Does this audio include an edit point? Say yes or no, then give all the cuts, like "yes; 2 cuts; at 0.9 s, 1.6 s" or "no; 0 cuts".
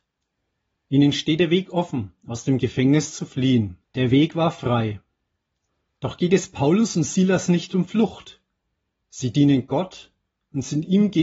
yes; 1 cut; at 3.8 s